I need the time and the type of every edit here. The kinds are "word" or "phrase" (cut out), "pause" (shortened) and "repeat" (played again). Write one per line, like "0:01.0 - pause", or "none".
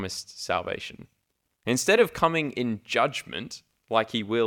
none